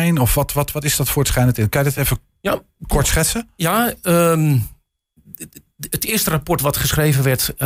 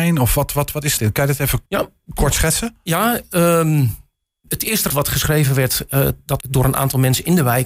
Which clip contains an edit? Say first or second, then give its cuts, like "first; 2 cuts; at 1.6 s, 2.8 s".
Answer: second; 5 cuts; at 1.0 s, 1.7 s, 4.5 s, 4.9 s, 6.4 s